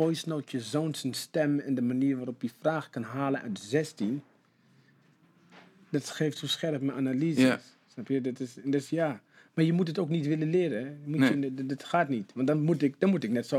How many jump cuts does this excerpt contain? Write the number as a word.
zero